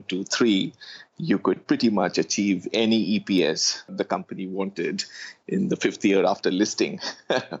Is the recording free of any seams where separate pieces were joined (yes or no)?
yes